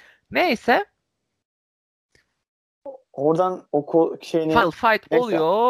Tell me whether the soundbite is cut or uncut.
uncut